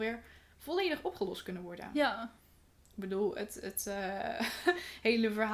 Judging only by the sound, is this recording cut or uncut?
uncut